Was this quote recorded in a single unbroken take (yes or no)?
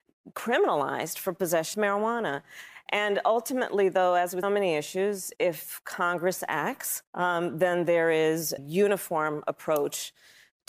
no